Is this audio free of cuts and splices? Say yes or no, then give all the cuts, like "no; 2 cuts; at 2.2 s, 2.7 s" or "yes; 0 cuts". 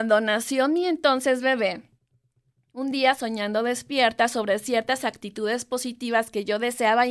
yes; 0 cuts